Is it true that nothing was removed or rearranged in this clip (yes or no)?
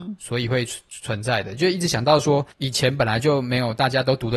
no